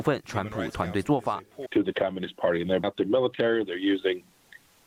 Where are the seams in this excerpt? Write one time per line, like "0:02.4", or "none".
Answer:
0:01.9
0:02.8